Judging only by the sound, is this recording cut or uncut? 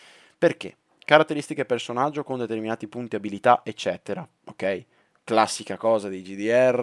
uncut